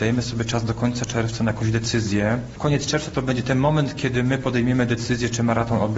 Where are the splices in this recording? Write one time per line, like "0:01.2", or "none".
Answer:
none